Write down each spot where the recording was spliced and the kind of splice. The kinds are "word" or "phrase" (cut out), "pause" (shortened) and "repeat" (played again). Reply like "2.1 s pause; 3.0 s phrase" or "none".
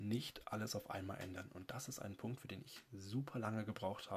none